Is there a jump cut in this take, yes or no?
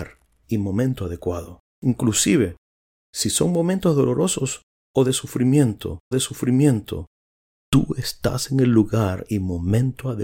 yes